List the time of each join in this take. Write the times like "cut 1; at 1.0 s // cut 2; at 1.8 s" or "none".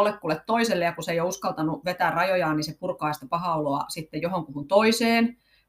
none